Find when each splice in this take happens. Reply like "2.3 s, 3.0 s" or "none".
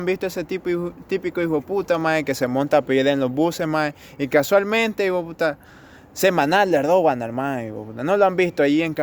none